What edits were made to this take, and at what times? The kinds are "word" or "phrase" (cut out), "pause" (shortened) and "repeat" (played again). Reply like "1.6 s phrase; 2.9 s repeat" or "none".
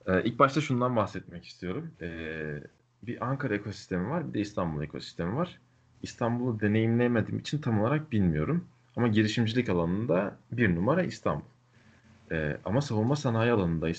1.9 s pause